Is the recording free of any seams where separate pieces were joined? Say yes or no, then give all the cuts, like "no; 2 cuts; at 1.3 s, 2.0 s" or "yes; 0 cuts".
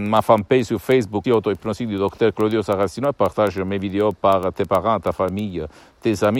no; 1 cut; at 1.2 s